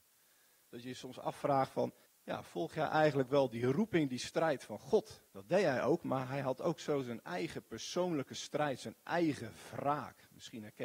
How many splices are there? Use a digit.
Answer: 2